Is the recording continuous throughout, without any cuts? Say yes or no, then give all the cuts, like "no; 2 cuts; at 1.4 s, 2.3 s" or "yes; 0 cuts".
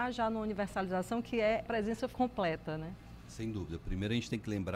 no; 2 cuts; at 1.6 s, 2.1 s